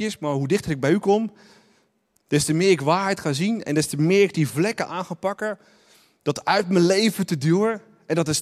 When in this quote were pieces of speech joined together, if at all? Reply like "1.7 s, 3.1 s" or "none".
none